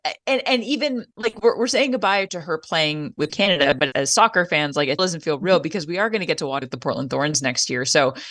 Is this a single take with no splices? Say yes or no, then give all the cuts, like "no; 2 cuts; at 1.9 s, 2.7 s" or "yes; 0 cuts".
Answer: no; 6 cuts; at 1.1 s, 2.3 s, 3.3 s, 3.9 s, 5.0 s, 6.6 s